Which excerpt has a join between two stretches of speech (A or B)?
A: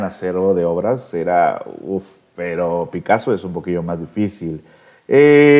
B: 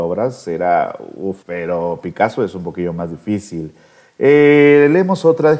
B